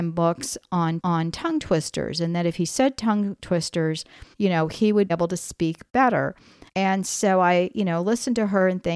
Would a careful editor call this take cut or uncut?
cut